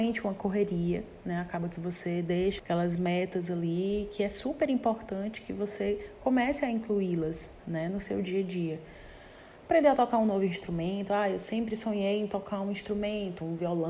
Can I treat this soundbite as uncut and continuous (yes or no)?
no